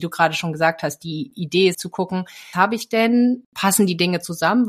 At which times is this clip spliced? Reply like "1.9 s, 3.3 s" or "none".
1.7 s, 2.5 s